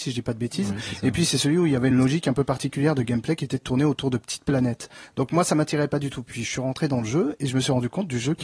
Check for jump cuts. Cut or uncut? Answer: uncut